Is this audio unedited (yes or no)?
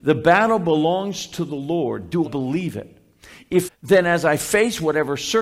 no